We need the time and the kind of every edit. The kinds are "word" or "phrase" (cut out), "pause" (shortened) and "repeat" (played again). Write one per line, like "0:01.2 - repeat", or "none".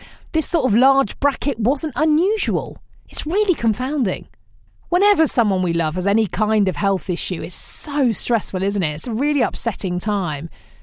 0:04.7 - pause